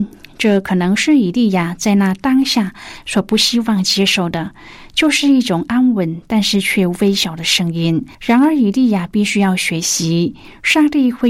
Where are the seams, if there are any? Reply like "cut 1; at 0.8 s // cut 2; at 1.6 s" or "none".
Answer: cut 1; at 8.1 s